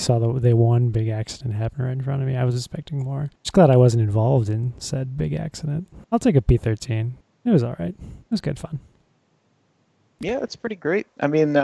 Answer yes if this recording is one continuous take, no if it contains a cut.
no